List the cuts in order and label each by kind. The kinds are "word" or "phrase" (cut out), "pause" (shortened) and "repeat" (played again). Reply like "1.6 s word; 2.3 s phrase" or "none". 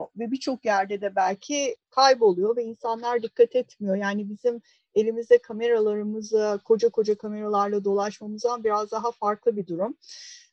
none